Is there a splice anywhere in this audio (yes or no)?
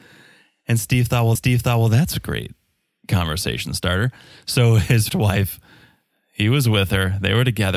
yes